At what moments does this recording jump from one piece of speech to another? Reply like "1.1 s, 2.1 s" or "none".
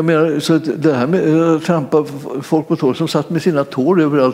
none